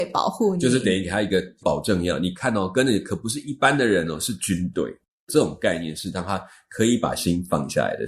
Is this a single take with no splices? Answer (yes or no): yes